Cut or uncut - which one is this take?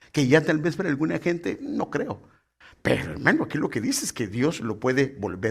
uncut